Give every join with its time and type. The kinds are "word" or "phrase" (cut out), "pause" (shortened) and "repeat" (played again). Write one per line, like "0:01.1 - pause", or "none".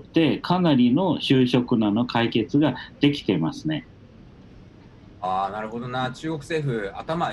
none

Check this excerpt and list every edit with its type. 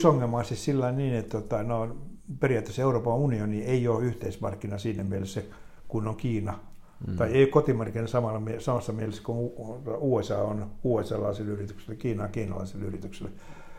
none

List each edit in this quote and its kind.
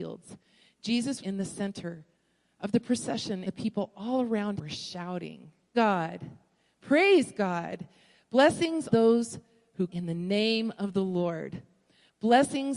0:01.2 - word
0:03.5 - word
0:04.6 - word
0:05.7 - word
0:08.9 - word
0:09.9 - word

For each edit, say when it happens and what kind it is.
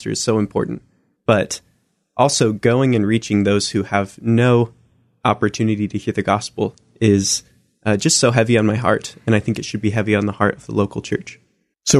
none

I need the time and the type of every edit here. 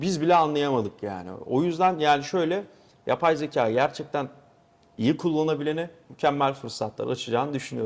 none

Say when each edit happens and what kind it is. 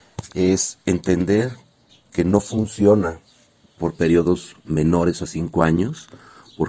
none

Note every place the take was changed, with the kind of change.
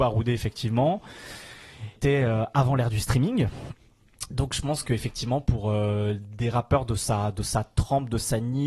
none

